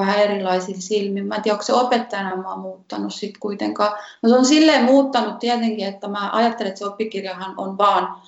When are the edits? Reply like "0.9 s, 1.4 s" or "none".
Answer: none

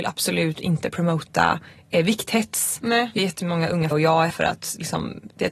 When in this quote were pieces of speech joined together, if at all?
3.2 s, 3.9 s, 4.3 s

